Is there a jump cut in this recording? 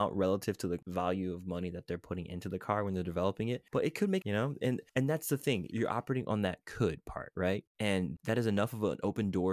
yes; 3 cuts; at 4.2 s, 4.9 s, 5.7 s

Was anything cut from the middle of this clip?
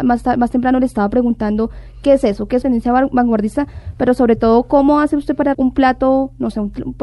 yes; 2 cuts; at 2.6 s, 5.5 s

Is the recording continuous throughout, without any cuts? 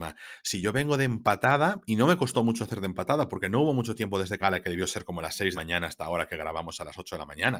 no; 2 cuts; at 4.4 s, 5.5 s

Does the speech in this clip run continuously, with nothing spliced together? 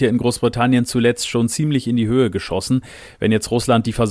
yes; 0 cuts

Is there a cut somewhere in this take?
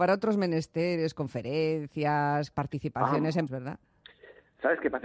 yes; 2 cuts; at 2.5 s, 3.5 s

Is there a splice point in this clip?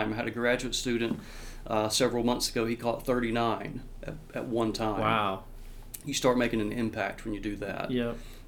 no; 0 cuts

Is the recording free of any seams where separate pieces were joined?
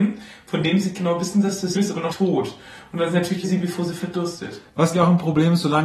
no; 5 cuts; at 0.9 s, 1.7 s, 2.1 s, 3.4 s, 4.9 s

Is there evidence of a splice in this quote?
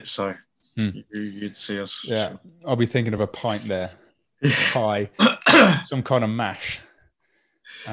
no; 0 cuts

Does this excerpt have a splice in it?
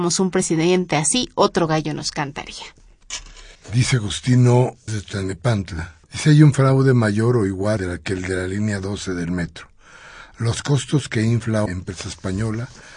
yes; 5 cuts; at 3.5 s, 4.9 s, 6.0 s, 7.8 s, 11.7 s

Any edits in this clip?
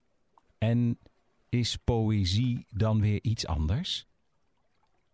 no; 0 cuts

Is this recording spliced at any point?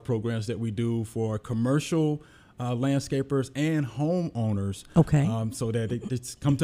no; 0 cuts

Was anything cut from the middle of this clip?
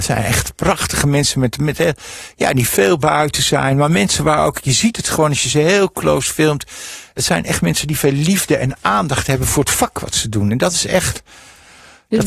no; 0 cuts

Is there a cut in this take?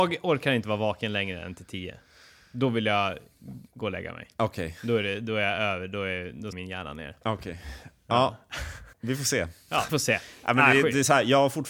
yes; 4 cuts; at 3.7 s, 6.5 s, 8.9 s, 9.9 s

